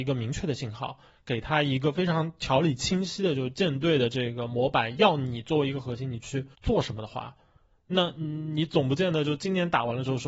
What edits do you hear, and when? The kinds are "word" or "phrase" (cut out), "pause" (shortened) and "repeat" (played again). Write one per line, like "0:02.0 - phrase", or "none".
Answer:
0:06.5 - pause